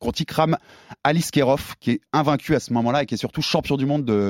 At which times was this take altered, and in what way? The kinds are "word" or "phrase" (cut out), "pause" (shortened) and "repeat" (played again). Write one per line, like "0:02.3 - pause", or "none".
none